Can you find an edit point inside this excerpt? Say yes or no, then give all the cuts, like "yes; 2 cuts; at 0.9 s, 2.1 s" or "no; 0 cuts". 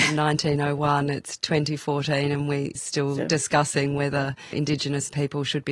yes; 2 cuts; at 2.8 s, 4.5 s